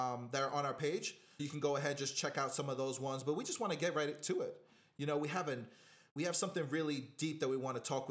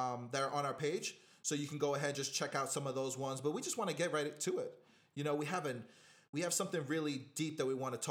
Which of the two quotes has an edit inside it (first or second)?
first